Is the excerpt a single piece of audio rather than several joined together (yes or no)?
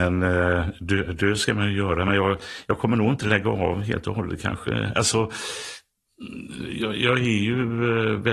yes